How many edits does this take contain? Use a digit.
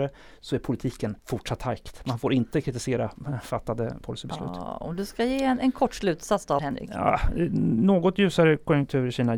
3